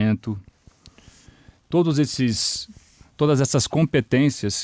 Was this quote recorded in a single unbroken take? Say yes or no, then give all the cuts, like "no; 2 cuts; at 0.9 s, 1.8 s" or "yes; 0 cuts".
yes; 0 cuts